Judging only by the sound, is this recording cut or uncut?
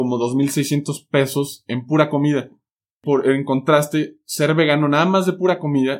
uncut